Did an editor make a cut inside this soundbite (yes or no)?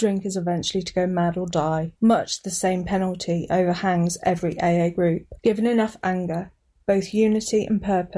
yes